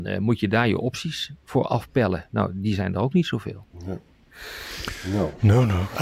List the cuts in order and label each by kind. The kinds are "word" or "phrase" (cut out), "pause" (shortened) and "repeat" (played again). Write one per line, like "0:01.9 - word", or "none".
0:03.7 - pause